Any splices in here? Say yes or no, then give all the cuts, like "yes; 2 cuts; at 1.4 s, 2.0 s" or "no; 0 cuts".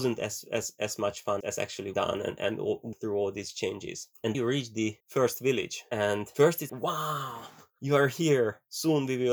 yes; 6 cuts; at 1.4 s, 1.9 s, 2.9 s, 4.3 s, 5.0 s, 6.7 s